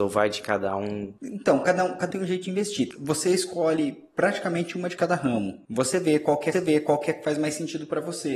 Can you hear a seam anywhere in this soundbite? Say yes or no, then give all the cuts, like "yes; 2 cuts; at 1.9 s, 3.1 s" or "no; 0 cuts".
yes; 2 cuts; at 2.1 s, 6.5 s